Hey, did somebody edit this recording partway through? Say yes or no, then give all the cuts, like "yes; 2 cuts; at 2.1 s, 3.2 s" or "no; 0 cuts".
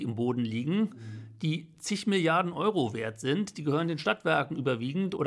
no; 0 cuts